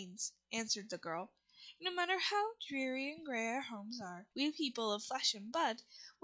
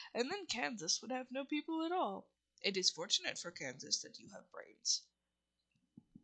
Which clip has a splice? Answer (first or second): first